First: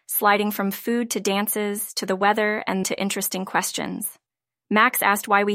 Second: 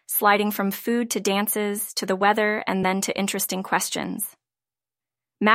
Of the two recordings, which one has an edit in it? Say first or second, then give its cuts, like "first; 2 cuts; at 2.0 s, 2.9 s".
first; 2 cuts; at 2.8 s, 4.3 s